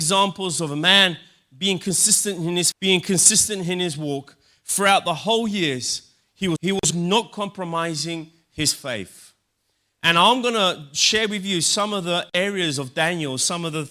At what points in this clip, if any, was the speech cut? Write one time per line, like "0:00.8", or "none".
0:02.7
0:06.6
0:06.9